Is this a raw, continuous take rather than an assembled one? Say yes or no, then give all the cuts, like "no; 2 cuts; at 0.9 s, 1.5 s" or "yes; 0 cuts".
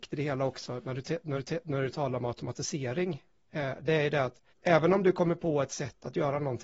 no; 2 cuts; at 1.4 s, 4.5 s